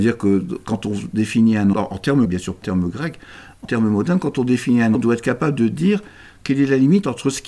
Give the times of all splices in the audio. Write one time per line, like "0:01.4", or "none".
0:01.7
0:02.2
0:02.6
0:03.6
0:04.9